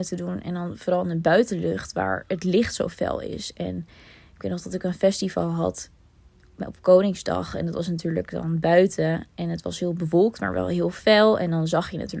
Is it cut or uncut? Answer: uncut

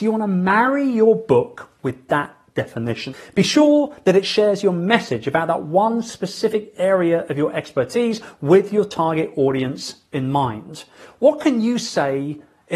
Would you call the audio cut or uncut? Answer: uncut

